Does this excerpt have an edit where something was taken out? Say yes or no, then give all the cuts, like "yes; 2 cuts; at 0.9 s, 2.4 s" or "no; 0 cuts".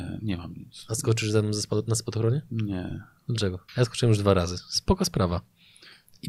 yes; 1 cut; at 3.7 s